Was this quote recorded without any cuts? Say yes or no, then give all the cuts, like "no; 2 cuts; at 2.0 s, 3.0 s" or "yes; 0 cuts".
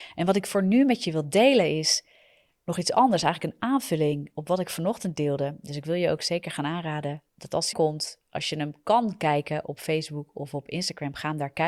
no; 2 cuts; at 7.3 s, 7.7 s